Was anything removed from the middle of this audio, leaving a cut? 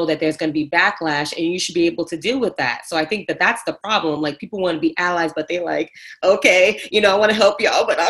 no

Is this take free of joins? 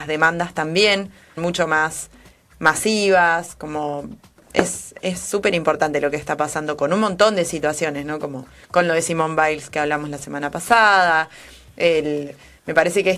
no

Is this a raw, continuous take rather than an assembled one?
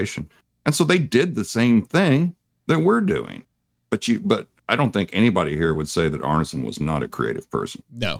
yes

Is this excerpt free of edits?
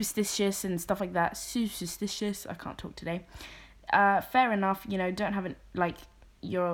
yes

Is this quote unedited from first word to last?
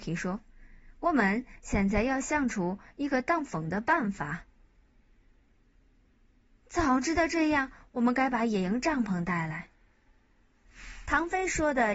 yes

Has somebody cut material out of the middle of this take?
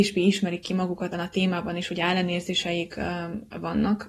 yes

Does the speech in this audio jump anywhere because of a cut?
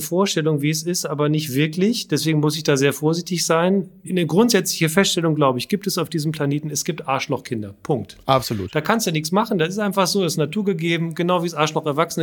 no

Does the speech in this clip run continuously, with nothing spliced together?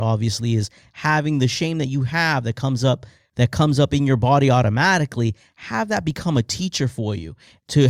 yes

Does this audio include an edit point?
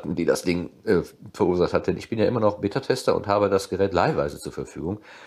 no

